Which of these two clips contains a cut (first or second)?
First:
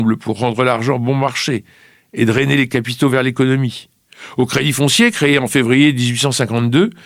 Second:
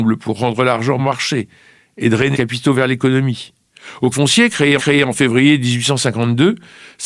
second